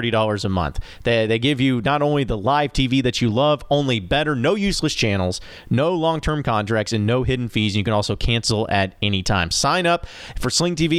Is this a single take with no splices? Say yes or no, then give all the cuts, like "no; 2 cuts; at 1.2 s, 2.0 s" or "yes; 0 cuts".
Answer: yes; 0 cuts